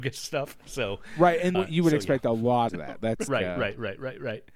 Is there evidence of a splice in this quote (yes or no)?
yes